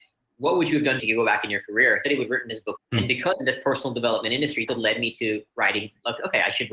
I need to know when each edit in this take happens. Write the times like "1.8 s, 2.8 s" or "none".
1.0 s, 2.0 s, 2.7 s, 3.4 s, 4.7 s